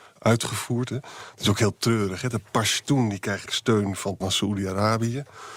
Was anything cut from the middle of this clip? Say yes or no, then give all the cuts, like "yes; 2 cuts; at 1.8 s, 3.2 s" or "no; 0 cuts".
yes; 2 cuts; at 3.5 s, 4.2 s